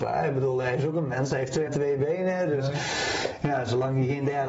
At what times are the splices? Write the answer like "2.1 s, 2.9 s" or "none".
1.7 s